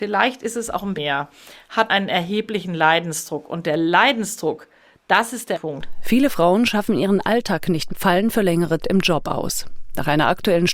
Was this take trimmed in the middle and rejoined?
yes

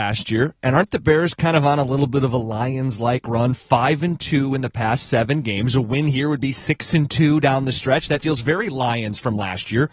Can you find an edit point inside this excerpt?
no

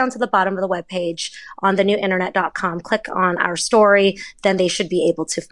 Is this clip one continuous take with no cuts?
yes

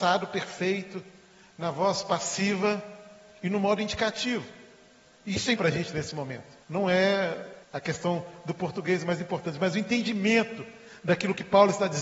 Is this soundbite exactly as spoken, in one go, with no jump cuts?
no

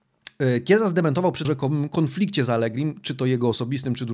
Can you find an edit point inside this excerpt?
yes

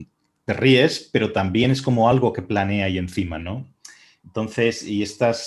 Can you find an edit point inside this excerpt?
no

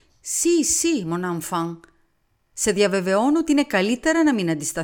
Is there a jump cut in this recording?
no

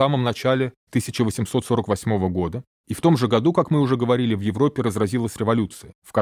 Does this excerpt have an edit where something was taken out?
no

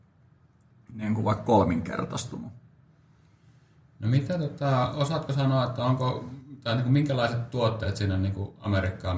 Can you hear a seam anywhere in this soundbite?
no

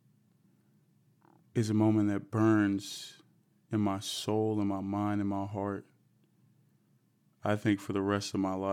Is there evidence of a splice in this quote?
no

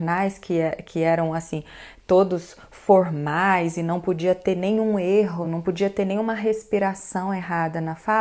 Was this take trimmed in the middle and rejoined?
no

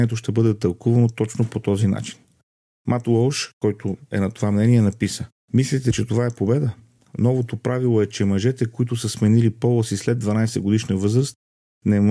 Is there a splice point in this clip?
yes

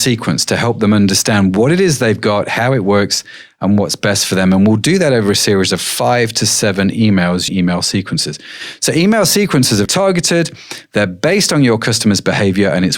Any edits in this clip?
yes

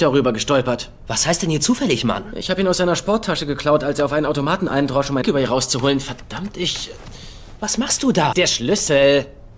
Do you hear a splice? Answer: yes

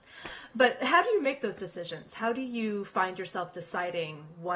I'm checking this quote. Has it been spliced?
no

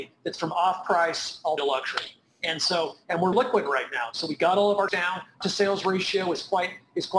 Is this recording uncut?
no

